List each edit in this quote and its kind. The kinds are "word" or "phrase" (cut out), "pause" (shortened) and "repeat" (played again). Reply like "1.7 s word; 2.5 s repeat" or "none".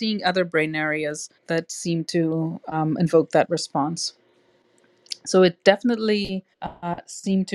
1.4 s pause; 6.5 s pause